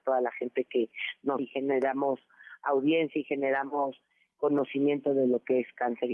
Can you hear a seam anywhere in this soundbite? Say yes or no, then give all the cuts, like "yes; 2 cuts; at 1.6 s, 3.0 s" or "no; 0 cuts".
yes; 1 cut; at 1.4 s